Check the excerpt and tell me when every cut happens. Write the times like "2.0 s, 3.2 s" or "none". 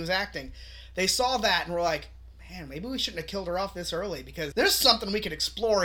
4.5 s